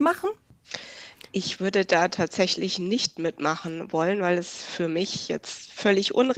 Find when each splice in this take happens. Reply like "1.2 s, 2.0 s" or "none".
none